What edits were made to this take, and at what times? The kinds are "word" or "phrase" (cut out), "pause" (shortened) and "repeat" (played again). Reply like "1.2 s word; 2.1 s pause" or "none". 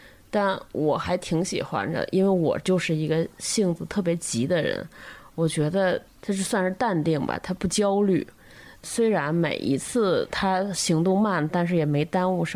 none